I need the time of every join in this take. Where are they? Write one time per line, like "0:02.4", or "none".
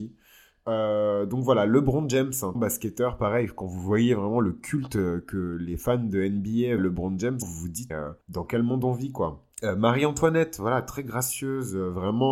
0:02.5
0:06.8
0:07.4
0:07.9
0:08.2
0:09.5